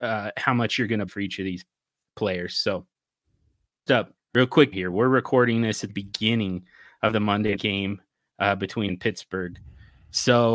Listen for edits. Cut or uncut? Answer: cut